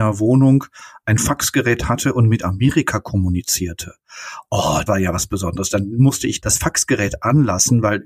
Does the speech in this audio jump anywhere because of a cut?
yes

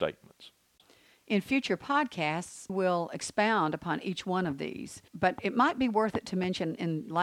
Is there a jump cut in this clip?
yes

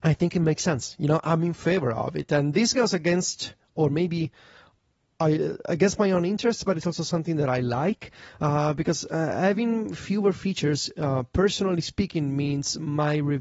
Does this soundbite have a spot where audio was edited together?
no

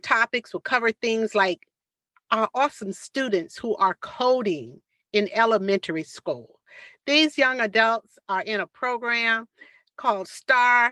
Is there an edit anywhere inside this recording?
no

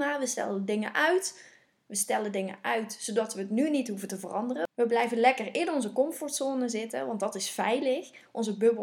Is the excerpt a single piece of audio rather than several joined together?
yes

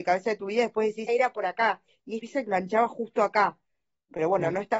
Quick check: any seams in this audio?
yes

